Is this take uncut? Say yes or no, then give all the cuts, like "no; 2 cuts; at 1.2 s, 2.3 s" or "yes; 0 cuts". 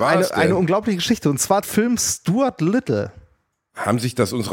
no; 1 cut; at 1.6 s